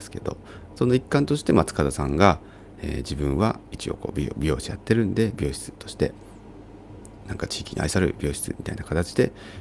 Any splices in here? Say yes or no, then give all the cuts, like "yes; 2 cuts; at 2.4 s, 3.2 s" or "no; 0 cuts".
no; 0 cuts